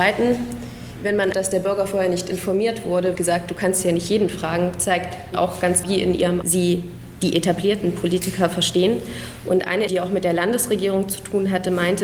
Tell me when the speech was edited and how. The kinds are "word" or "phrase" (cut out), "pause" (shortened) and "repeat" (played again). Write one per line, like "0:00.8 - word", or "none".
0:01.3 - word
0:03.1 - word
0:05.3 - word
0:05.8 - word
0:06.4 - word
0:09.9 - word